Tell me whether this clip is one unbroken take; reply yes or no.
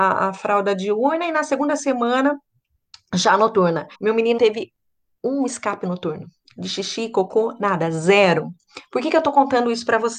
no